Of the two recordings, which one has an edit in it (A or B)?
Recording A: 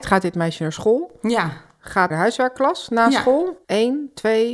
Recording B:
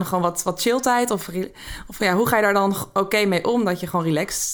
A